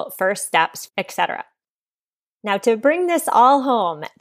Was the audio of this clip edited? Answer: no; 0 cuts

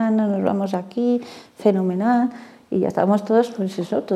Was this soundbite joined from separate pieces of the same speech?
no; 0 cuts

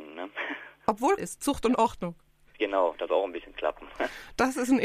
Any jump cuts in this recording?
yes; 2 cuts; at 1.2 s, 3.1 s

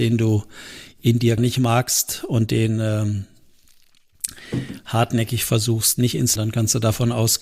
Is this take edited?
yes; 2 cuts; at 1.4 s, 6.4 s

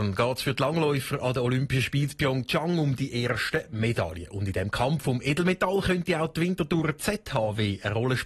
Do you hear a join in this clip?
no; 0 cuts

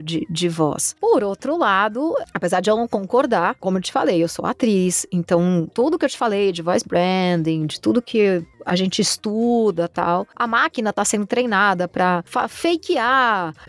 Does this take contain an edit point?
no; 0 cuts

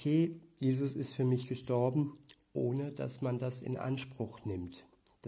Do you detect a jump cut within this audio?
no; 0 cuts

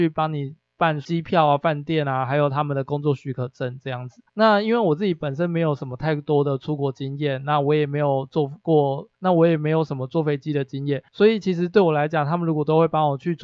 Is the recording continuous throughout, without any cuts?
no; 3 cuts; at 4.3 s, 9.1 s, 11.1 s

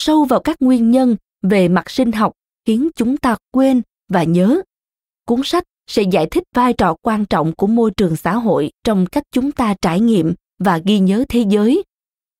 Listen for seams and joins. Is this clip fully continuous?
no; 1 cut; at 8.7 s

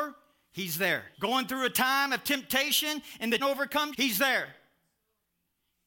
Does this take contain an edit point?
yes; 3 cuts; at 1.1 s, 3.4 s, 3.9 s

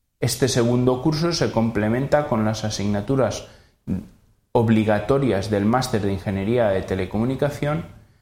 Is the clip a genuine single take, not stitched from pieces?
yes; 0 cuts

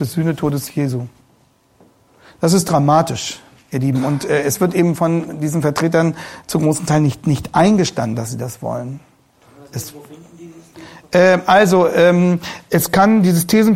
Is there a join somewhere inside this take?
no; 0 cuts

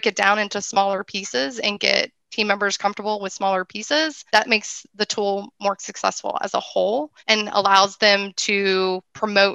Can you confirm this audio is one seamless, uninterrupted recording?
no; 3 cuts; at 2.2 s, 4.3 s, 7.2 s

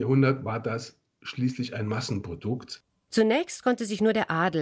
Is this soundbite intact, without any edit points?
yes; 0 cuts

